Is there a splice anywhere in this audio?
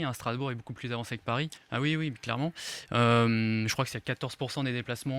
yes; 1 cut; at 1.6 s

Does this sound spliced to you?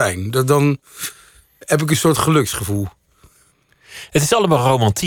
no; 0 cuts

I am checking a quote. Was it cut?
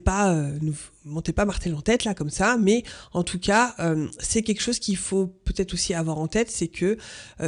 no; 0 cuts

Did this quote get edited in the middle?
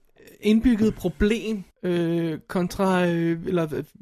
yes; 1 cut; at 1.7 s

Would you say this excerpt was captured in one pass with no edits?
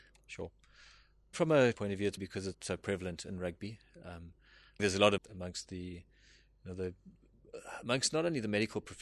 no; 6 cuts; at 1.3 s, 1.7 s, 2.2 s, 2.5 s, 4.8 s, 5.2 s

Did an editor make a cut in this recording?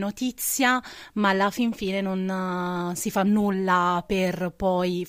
no; 0 cuts

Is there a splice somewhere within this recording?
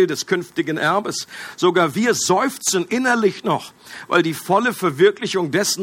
no; 0 cuts

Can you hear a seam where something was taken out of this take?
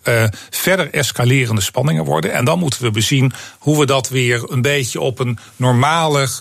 no; 0 cuts

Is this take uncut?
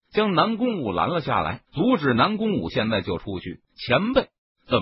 no; 2 cuts; at 1.7 s, 3.7 s

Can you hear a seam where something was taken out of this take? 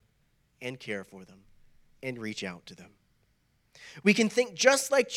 no; 0 cuts

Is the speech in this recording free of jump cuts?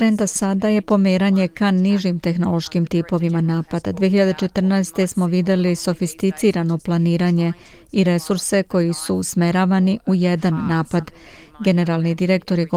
yes; 0 cuts

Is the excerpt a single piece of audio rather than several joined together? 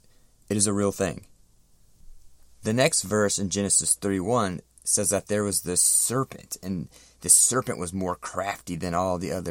yes; 0 cuts

